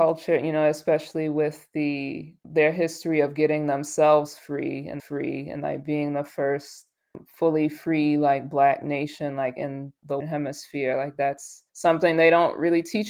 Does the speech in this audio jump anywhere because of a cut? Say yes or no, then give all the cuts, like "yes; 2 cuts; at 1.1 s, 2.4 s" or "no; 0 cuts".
yes; 3 cuts; at 5.0 s, 10.2 s, 11.7 s